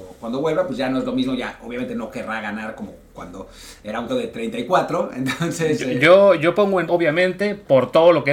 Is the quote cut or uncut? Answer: cut